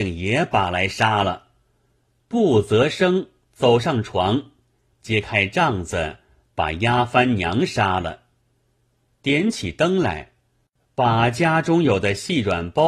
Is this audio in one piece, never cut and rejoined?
yes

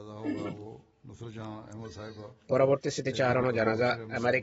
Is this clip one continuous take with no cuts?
yes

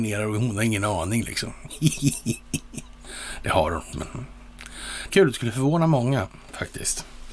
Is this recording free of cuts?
no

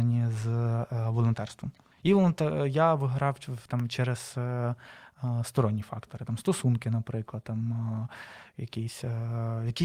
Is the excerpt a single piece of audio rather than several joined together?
no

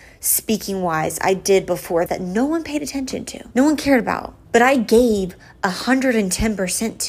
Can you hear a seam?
yes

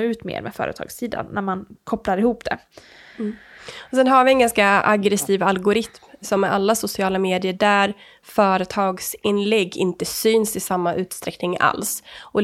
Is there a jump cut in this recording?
no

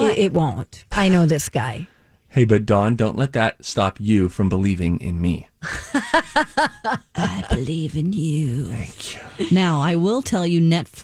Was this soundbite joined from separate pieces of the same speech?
yes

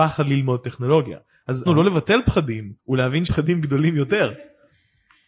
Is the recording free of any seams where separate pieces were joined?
no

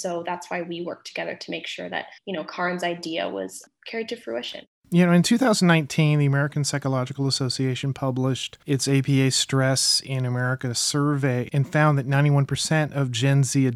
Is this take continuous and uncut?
no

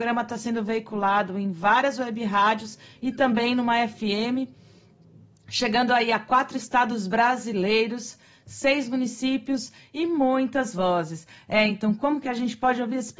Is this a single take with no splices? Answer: yes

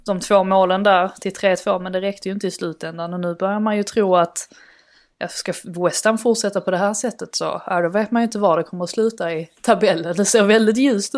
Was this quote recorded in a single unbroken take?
yes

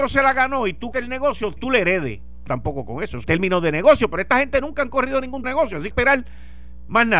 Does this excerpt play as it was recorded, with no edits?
no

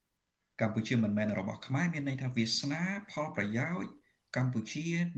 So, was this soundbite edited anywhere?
no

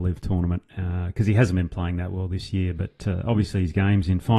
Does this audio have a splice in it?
no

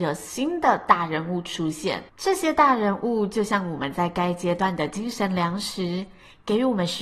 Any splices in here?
yes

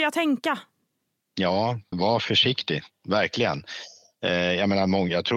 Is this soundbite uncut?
no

